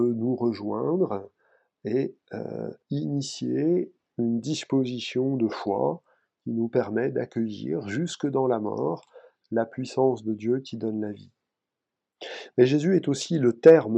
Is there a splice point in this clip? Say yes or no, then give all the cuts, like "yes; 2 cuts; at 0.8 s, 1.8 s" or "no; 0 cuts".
yes; 1 cut; at 2.8 s